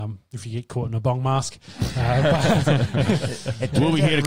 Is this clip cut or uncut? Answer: uncut